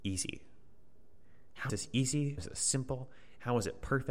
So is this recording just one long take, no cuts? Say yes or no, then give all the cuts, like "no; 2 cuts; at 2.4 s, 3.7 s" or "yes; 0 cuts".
no; 2 cuts; at 1.7 s, 2.4 s